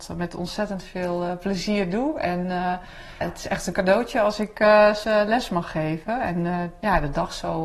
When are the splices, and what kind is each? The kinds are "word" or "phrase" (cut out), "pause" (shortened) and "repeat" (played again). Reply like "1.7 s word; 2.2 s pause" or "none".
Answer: 3.2 s word; 5.0 s word